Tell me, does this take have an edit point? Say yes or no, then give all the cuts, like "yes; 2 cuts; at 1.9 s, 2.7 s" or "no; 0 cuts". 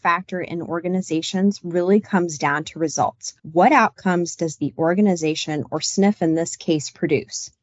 yes; 1 cut; at 3.4 s